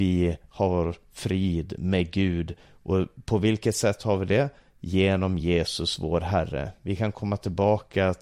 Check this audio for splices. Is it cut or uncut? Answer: uncut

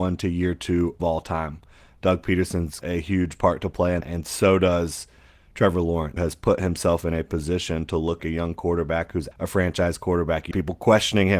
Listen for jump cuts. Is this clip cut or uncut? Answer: cut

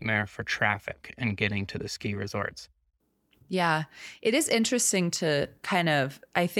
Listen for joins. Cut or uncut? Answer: uncut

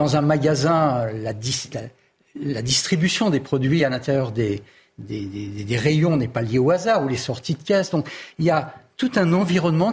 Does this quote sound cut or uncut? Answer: uncut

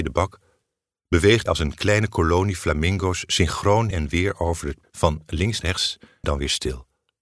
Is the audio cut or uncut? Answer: cut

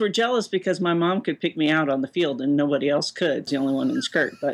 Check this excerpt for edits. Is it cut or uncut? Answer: cut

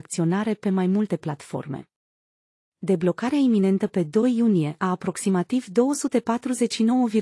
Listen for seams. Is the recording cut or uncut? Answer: uncut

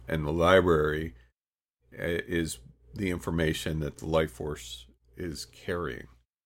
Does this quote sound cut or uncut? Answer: uncut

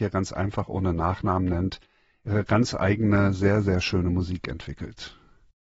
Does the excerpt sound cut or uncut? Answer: uncut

